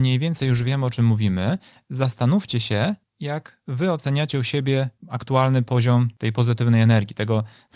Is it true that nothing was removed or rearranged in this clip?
no; 1 cut; at 5.0 s

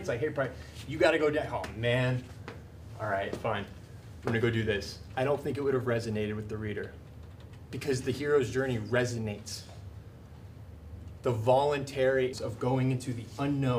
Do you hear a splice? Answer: yes; 1 cut; at 12.3 s

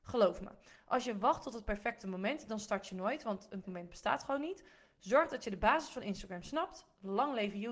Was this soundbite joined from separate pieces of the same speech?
yes; 1 cut; at 3.6 s

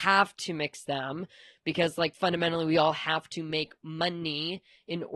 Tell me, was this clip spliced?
no; 0 cuts

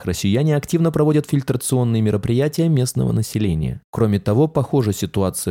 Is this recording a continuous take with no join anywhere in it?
yes; 0 cuts

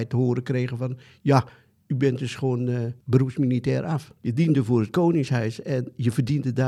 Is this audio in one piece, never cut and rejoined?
no; 2 cuts; at 3.0 s, 4.2 s

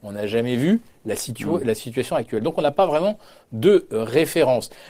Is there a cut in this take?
no; 0 cuts

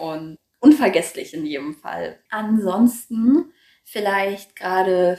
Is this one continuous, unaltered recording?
no; 1 cut; at 2.3 s

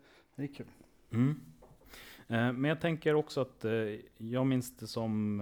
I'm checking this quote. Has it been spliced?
no; 0 cuts

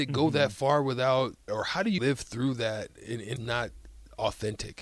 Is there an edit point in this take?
yes; 3 cuts; at 1.5 s, 2.0 s, 3.4 s

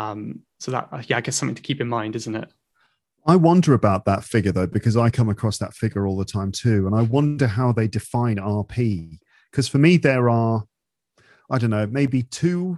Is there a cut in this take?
no; 0 cuts

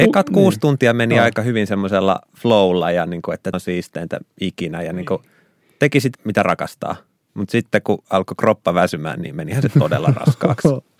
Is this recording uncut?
no; 2 cuts; at 3.5 s, 6.1 s

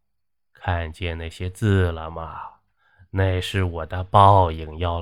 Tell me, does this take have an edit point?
no; 0 cuts

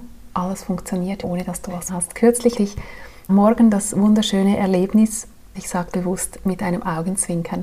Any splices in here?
yes; 6 cuts; at 1.2 s, 1.9 s, 2.6 s, 3.3 s, 5.5 s, 5.9 s

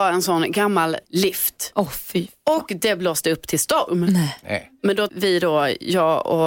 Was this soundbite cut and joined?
yes; 2 cuts; at 1.0 s, 5.1 s

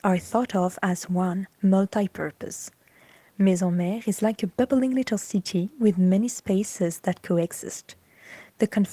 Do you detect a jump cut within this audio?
no; 0 cuts

